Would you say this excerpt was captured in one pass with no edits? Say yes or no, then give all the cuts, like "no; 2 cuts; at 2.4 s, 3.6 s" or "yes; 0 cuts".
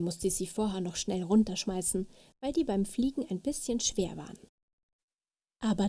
yes; 0 cuts